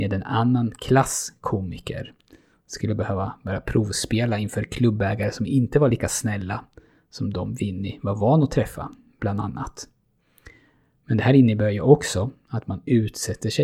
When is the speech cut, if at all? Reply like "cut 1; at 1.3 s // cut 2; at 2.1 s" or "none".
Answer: none